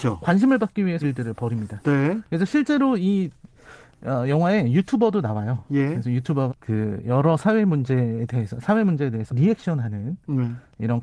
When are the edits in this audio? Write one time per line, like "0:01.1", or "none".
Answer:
0:01.0
0:06.5
0:09.3